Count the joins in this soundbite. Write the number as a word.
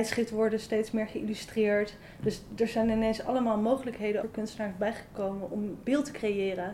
one